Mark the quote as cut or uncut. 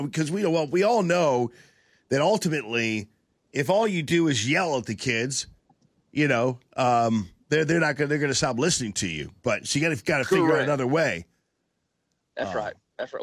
uncut